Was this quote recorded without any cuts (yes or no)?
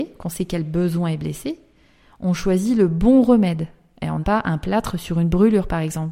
no